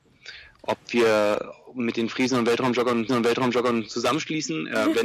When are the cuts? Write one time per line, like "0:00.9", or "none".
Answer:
0:03.1

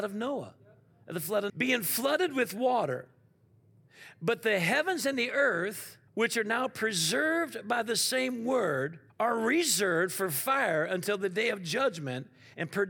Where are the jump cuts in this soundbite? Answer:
0:01.5
0:06.1
0:09.1

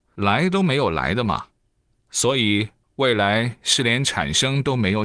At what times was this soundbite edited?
none

